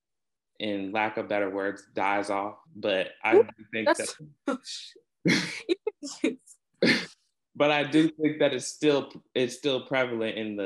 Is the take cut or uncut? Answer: cut